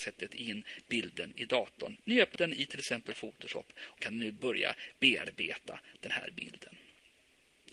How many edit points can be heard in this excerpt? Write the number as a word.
two